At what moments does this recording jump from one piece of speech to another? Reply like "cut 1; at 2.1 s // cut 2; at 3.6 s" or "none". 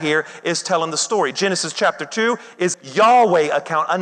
cut 1; at 2.7 s